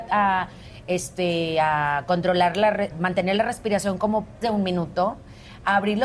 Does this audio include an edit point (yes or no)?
yes